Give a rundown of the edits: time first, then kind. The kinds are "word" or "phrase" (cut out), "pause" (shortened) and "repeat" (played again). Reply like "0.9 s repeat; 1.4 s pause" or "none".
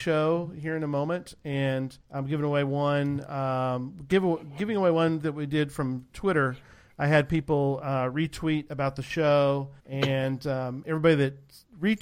2.0 s pause; 9.8 s pause

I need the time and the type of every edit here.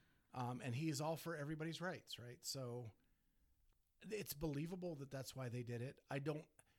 none

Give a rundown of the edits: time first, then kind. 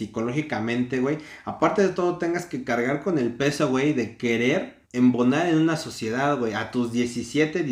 4.8 s pause

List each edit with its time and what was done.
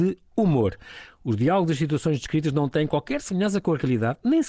none

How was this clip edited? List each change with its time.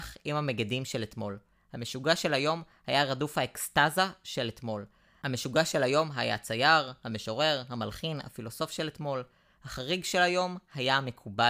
none

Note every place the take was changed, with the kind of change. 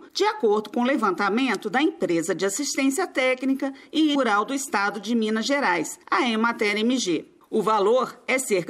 4.1 s word; 6.0 s pause

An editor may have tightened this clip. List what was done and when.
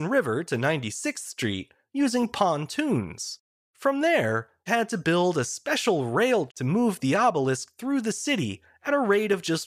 3.6 s pause; 4.7 s word; 6.5 s word

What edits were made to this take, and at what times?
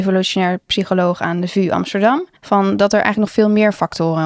2.4 s pause

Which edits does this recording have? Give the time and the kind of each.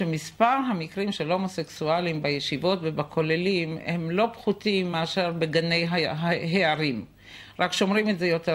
none

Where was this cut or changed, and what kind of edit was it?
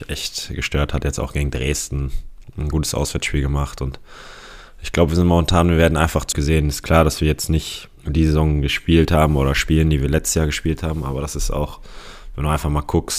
6.3 s word; 8.0 s pause

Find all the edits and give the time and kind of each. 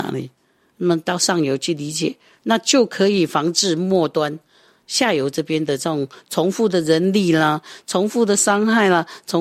none

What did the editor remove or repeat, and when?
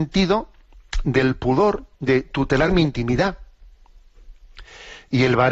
1.9 s pause

